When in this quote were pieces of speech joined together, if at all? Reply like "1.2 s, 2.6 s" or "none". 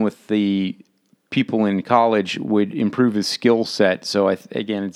none